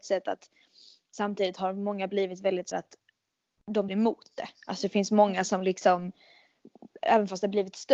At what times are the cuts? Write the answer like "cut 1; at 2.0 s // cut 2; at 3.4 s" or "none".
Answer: cut 1; at 2.7 s // cut 2; at 3.9 s